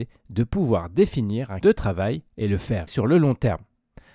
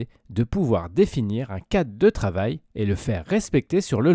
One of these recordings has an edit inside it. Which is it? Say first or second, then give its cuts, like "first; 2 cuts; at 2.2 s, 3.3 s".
first; 2 cuts; at 1.6 s, 2.9 s